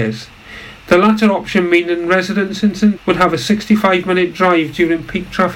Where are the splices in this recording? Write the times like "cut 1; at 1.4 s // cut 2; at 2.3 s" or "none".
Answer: cut 1; at 3.0 s